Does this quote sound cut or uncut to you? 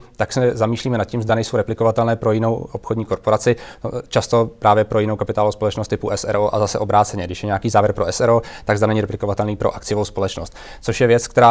uncut